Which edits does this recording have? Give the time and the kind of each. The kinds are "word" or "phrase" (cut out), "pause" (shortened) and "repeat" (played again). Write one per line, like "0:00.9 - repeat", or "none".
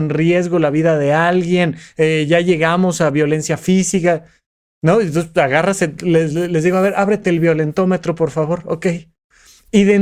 none